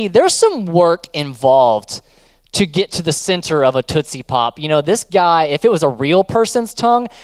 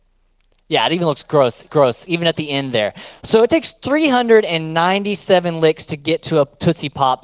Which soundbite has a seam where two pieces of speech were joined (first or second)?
second